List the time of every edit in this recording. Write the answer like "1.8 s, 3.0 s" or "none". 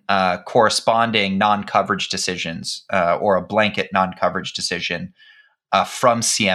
none